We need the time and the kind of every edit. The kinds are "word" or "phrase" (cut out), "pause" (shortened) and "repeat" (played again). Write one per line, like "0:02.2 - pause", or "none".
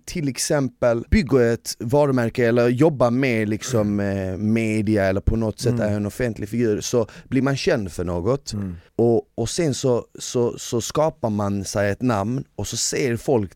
0:08.9 - pause